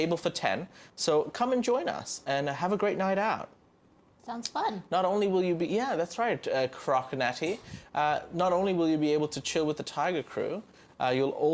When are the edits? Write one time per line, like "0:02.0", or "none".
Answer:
none